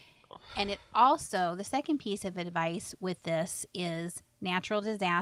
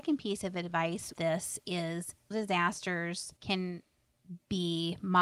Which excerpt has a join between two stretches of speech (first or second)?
second